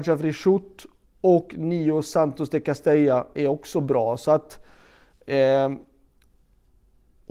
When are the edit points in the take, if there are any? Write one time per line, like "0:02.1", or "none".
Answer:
0:03.4

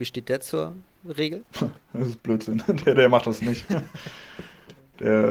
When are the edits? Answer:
none

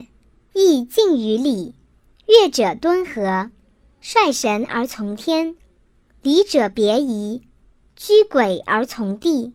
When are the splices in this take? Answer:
none

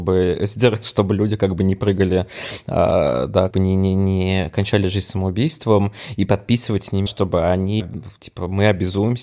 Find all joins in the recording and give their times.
0:03.5
0:07.1
0:07.8

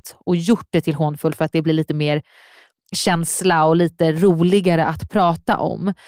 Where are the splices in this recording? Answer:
none

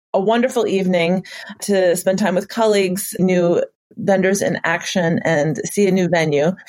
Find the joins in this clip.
0:01.6
0:03.2

